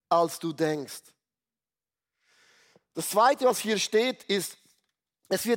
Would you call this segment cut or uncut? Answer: uncut